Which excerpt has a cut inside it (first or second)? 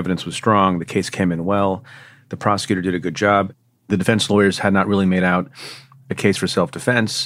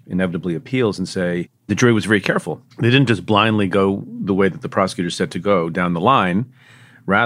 second